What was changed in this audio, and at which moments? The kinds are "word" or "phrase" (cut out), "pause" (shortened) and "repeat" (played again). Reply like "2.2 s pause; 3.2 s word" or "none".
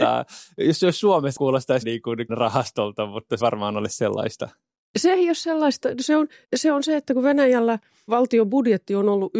1.4 s word; 1.8 s word; 2.3 s word; 3.4 s word; 6.4 s word; 8.1 s word